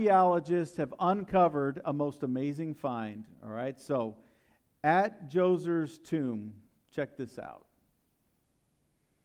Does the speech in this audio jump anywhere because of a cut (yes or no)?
no